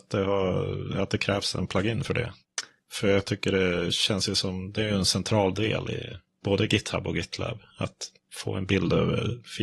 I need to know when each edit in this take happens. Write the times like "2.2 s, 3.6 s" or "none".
none